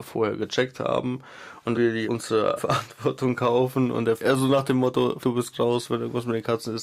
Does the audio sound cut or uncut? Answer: cut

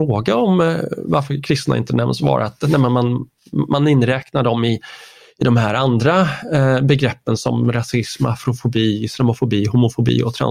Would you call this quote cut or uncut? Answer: uncut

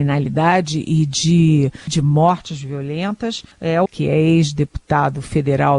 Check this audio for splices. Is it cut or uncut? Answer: cut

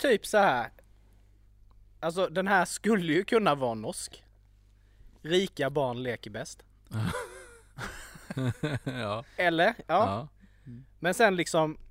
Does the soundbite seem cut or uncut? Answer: uncut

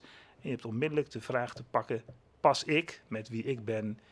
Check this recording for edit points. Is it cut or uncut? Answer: uncut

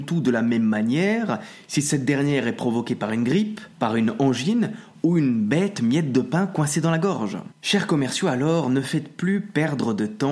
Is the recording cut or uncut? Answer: cut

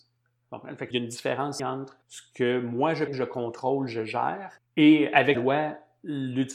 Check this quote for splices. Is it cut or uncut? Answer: cut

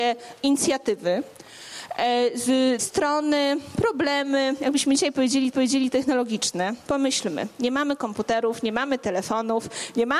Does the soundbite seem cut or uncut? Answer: cut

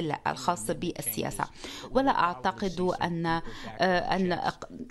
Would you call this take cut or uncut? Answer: uncut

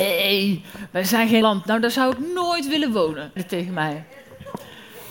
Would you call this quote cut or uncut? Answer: cut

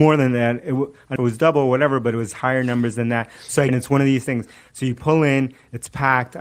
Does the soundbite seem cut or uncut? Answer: cut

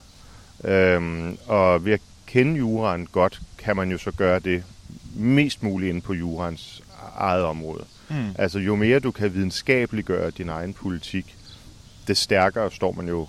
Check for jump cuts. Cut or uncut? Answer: uncut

